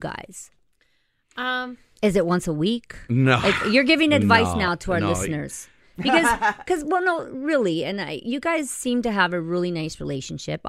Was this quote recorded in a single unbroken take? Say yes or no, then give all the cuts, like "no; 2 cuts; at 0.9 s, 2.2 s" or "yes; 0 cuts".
yes; 0 cuts